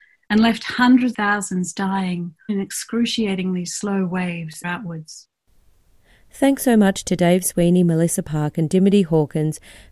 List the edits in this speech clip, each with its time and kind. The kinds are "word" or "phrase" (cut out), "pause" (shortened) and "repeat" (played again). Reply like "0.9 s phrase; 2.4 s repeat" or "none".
1.1 s word; 2.5 s word; 4.6 s word

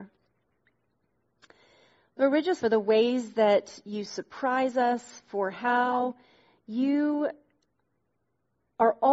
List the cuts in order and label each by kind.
2.6 s phrase

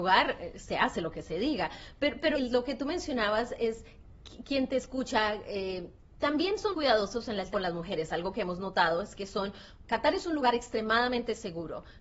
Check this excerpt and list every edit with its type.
2.3 s word; 6.7 s word; 7.5 s word; 9.8 s word

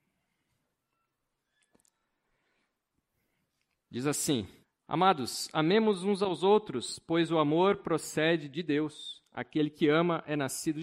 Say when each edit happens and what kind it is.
4.6 s pause

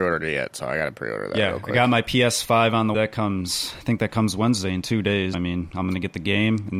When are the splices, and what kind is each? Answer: 2.9 s word; 5.3 s word

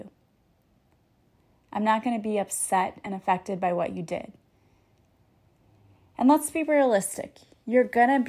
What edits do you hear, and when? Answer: none

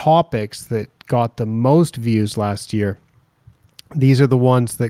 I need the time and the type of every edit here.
none

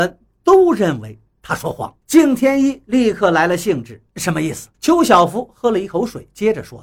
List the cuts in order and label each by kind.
2.0 s pause; 4.1 s pause; 4.7 s pause

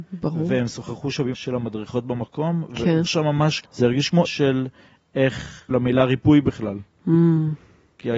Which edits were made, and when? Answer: 1.3 s word; 3.1 s word; 3.6 s word; 4.3 s word; 5.7 s word

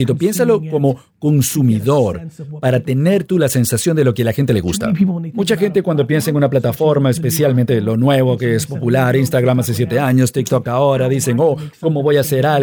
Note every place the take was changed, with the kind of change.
none

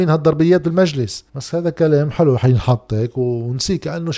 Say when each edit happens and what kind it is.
1.3 s pause

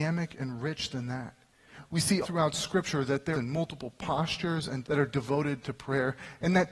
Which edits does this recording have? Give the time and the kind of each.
2.2 s word; 3.3 s phrase; 4.8 s word

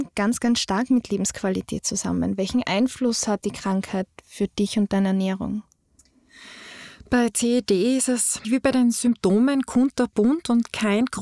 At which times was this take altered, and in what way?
3.4 s word; 8.4 s word

